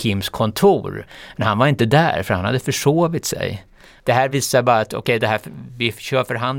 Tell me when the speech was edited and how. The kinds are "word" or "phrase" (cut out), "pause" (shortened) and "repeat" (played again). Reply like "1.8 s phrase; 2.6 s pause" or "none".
none